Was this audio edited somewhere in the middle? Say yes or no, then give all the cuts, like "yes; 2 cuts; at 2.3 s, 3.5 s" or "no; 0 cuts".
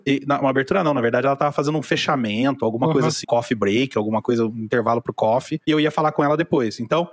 yes; 1 cut; at 3.2 s